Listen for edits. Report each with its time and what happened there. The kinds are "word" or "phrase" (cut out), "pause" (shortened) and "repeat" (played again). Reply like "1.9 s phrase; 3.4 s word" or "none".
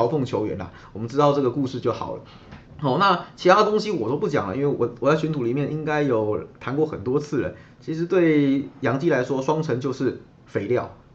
2.7 s pause